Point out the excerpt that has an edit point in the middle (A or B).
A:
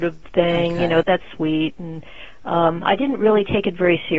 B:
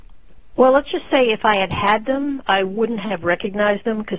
A